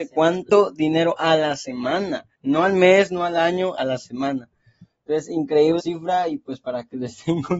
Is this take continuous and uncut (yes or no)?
no